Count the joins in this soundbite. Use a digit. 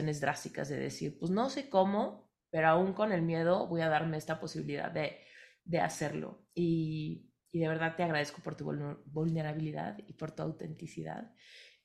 1